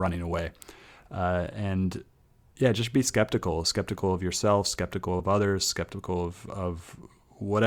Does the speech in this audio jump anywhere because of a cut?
no; 0 cuts

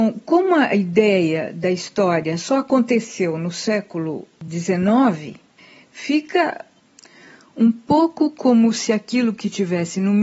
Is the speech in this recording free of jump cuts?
yes; 0 cuts

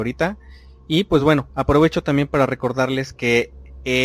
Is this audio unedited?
yes; 0 cuts

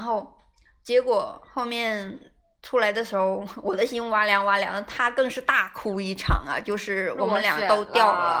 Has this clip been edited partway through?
no; 0 cuts

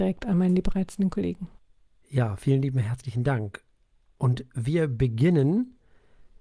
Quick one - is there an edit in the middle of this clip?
no; 0 cuts

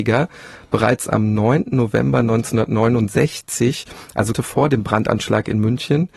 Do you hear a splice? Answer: yes; 1 cut; at 4.3 s

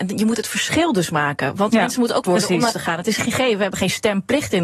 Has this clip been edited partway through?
yes; 3 cuts; at 2.2 s, 2.7 s, 3.2 s

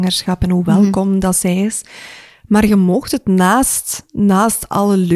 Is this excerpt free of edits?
yes; 0 cuts

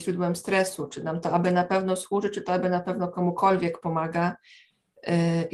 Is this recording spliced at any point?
no; 0 cuts

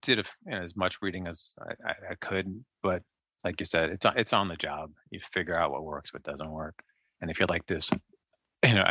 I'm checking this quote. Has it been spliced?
no; 0 cuts

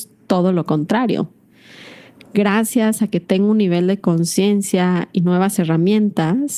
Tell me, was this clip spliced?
no; 0 cuts

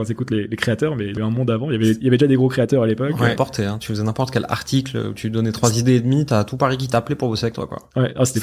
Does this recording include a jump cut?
yes; 2 cuts; at 1.2 s, 3.4 s

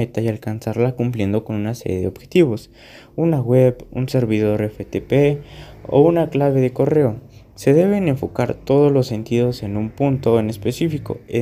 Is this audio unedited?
yes; 0 cuts

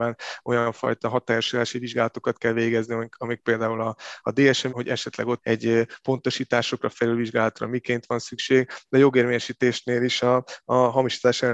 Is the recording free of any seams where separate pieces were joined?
no; 2 cuts; at 4.7 s, 5.4 s

